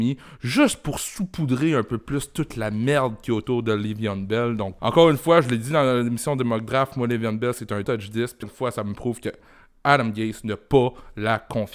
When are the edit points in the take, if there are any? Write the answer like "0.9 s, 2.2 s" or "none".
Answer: 4.8 s, 7.8 s, 8.4 s

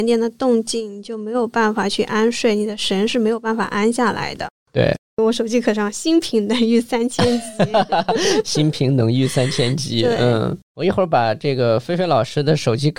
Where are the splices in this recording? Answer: 10.6 s

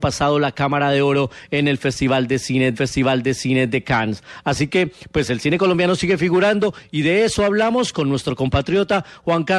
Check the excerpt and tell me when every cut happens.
2.7 s

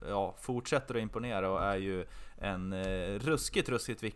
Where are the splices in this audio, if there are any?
none

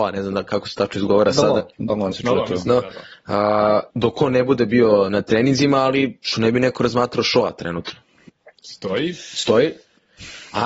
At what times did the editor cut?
1.7 s, 2.1 s, 3.9 s, 8.3 s

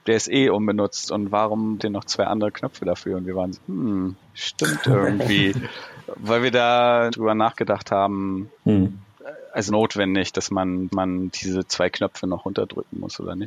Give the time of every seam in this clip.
1.8 s, 3.5 s, 4.2 s, 7.1 s, 8.5 s, 9.7 s, 10.9 s

